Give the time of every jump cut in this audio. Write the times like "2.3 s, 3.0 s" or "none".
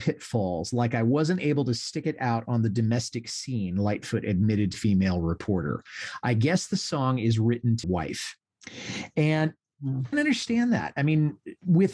4.7 s, 7.8 s, 10.1 s